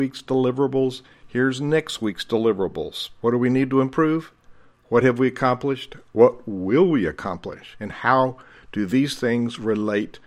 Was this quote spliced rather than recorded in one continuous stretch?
no; 0 cuts

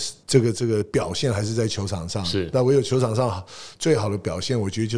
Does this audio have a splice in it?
no; 0 cuts

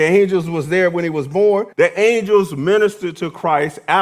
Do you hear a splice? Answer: yes; 1 cut; at 1.7 s

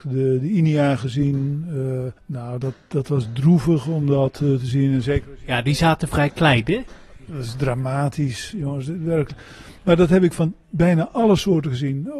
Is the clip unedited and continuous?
no; 1 cut; at 2.2 s

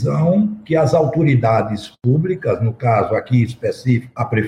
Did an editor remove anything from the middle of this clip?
no; 0 cuts

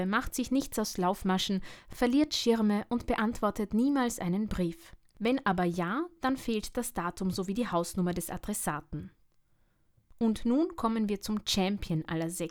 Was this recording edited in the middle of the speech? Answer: no; 0 cuts

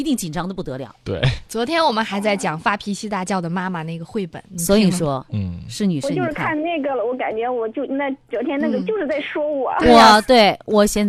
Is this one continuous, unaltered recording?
yes; 0 cuts

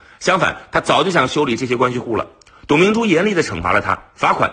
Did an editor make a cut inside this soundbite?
no; 0 cuts

